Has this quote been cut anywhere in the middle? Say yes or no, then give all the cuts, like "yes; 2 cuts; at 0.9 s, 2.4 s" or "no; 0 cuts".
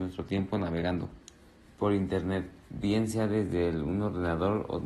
yes; 1 cut; at 2.6 s